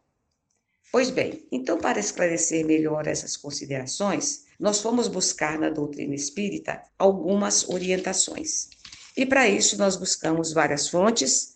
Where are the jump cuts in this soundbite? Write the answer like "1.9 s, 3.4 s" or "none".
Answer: 1.5 s, 4.5 s, 6.9 s, 9.1 s